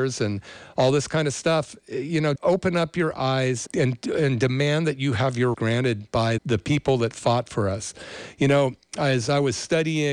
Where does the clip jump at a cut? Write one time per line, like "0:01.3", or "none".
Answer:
0:02.4
0:03.7
0:05.5
0:06.4

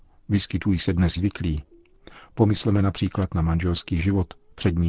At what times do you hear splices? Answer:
0:01.2

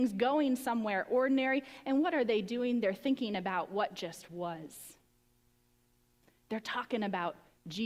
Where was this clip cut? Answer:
none

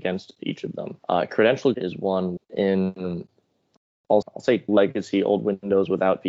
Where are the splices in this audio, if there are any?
0:01.0
0:01.7
0:02.4
0:04.2
0:04.7

